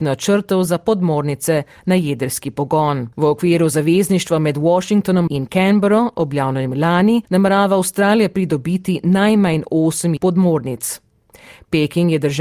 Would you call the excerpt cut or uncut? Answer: cut